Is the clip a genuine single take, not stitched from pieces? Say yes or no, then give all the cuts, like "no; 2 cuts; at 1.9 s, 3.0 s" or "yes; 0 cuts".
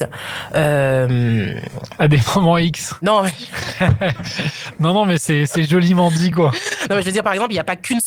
yes; 0 cuts